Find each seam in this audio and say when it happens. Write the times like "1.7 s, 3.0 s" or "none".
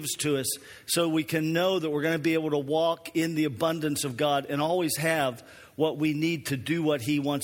none